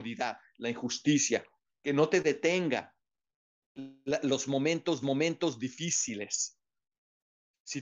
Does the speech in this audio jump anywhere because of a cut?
yes; 1 cut; at 5.0 s

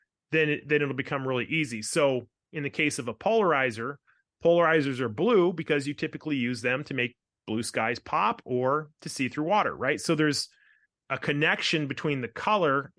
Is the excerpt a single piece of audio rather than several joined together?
yes; 0 cuts

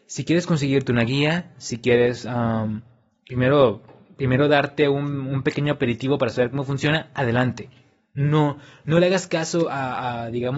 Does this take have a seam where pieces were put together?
no; 0 cuts

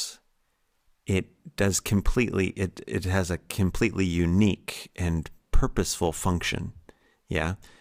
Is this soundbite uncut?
yes; 0 cuts

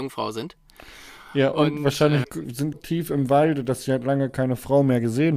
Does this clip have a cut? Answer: yes; 2 cuts; at 2.2 s, 2.7 s

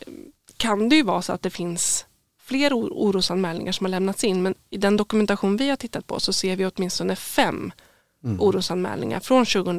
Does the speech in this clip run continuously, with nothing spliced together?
yes; 0 cuts

